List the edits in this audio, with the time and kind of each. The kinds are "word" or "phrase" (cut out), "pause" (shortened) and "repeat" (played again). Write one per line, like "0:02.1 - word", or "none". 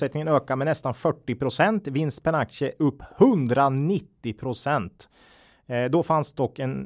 none